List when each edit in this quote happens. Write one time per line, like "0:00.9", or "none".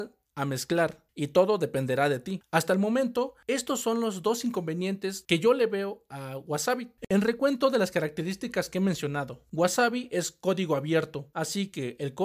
none